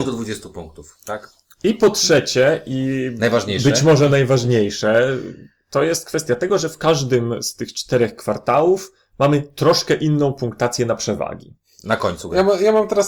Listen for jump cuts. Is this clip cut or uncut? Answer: uncut